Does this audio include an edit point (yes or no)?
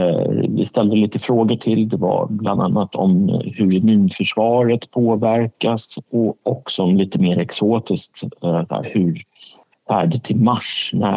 no